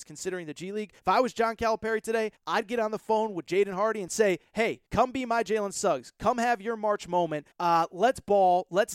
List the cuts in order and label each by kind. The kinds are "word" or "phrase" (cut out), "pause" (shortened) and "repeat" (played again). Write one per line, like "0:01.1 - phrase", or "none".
0:01.0 - pause
0:02.4 - pause
0:04.9 - pause
0:07.5 - pause